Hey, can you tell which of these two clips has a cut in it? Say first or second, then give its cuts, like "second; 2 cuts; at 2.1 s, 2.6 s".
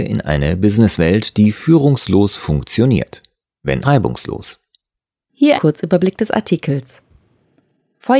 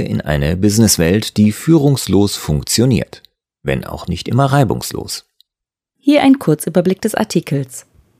first; 2 cuts; at 3.8 s, 5.5 s